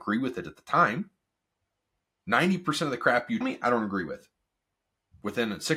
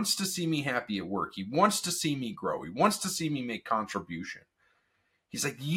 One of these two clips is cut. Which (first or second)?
first